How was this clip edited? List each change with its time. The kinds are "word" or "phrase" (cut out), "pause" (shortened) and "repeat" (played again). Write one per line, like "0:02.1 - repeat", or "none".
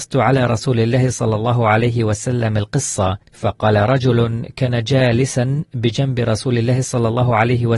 0:03.2 - pause